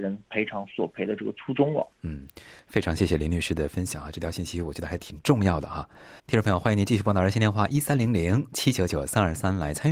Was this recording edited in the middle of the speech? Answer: yes; 2 cuts; at 1.9 s, 6.2 s

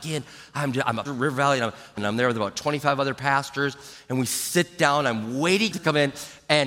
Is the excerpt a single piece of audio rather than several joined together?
no; 3 cuts; at 1.0 s, 2.0 s, 5.7 s

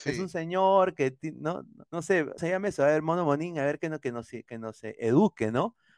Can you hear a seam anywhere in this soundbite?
yes; 2 cuts; at 1.9 s, 2.4 s

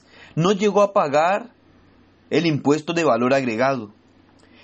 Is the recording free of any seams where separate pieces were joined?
yes; 0 cuts

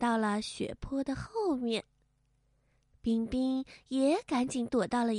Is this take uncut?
yes; 0 cuts

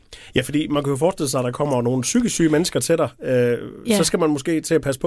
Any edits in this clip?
no; 0 cuts

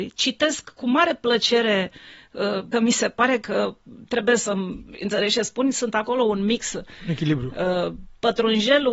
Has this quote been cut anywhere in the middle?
yes; 1 cut; at 2.7 s

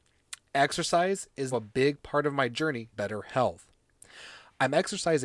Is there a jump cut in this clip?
yes; 2 cuts; at 1.5 s, 2.9 s

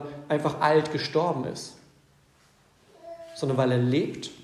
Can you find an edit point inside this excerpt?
no; 0 cuts

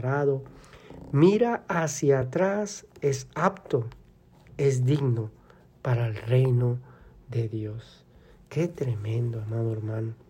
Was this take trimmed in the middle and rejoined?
no; 0 cuts

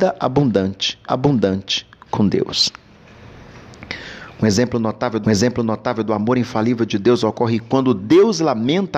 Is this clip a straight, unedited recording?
no; 2 cuts; at 1.1 s, 5.2 s

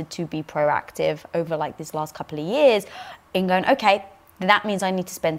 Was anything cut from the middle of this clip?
no; 0 cuts

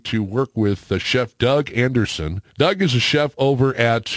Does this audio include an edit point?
yes; 1 cut; at 2.5 s

